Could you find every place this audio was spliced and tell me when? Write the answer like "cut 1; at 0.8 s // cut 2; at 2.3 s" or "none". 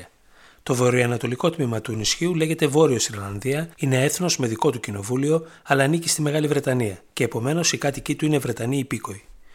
cut 1; at 3.7 s // cut 2; at 7.1 s